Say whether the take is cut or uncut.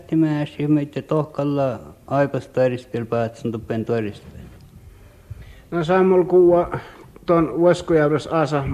uncut